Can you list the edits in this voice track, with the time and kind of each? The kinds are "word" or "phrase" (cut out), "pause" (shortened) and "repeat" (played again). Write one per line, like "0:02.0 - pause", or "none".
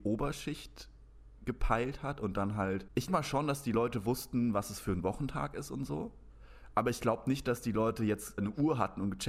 0:03.1 - word
0:08.4 - word